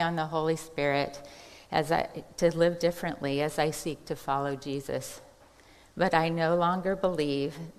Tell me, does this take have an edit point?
no; 0 cuts

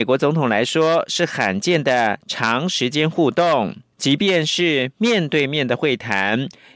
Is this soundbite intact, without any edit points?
no; 1 cut; at 3.9 s

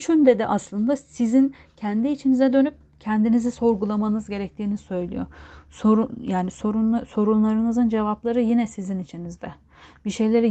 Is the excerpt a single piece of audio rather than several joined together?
yes; 0 cuts

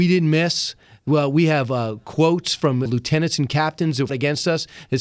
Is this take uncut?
no; 2 cuts; at 2.9 s, 4.1 s

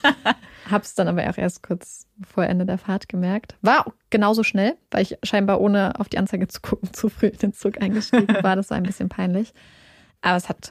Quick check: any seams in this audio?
no; 0 cuts

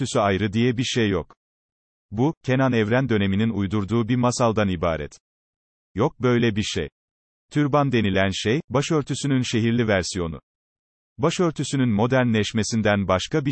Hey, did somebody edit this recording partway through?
no; 0 cuts

